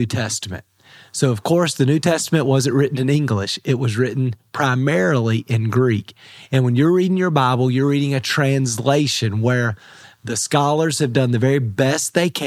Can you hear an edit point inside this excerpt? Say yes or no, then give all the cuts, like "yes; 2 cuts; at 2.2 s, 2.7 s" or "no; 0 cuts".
no; 0 cuts